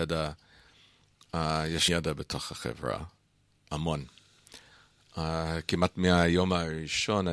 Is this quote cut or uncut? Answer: cut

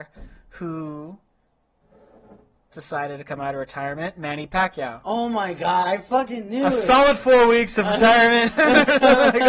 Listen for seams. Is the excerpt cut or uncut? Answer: cut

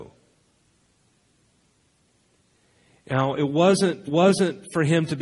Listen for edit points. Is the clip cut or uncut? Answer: cut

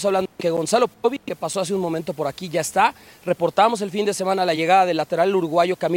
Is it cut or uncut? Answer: uncut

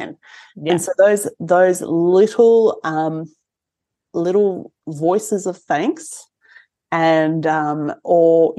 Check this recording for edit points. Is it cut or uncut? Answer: uncut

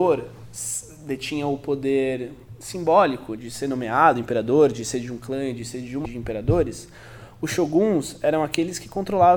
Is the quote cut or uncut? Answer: cut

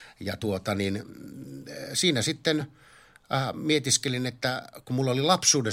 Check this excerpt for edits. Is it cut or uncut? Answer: uncut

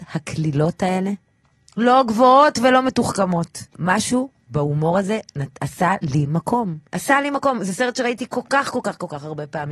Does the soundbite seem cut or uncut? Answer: cut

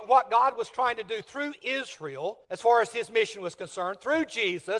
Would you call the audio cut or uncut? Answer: cut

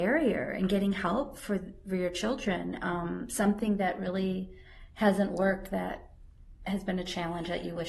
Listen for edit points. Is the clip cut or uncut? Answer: uncut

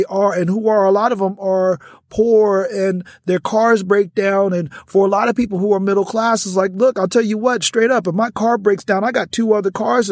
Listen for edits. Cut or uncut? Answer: uncut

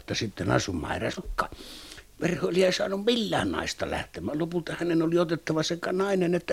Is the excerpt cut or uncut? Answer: cut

